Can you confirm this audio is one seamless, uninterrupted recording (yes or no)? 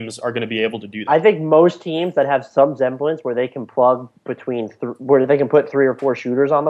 no